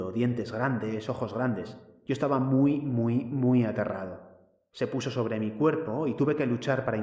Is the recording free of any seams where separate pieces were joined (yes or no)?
yes